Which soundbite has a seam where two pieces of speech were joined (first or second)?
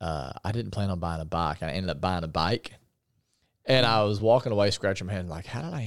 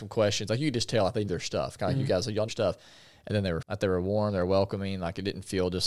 second